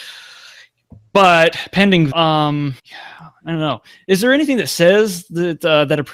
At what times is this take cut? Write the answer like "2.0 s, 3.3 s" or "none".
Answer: 2.1 s, 2.8 s